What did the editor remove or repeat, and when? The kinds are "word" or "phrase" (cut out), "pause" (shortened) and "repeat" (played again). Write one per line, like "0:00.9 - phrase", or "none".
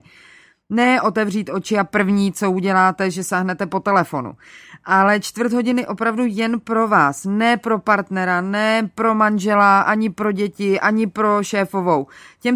none